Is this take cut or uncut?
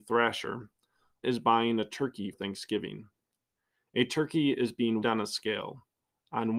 cut